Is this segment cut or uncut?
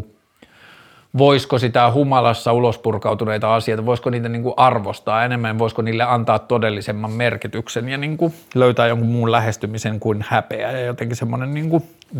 uncut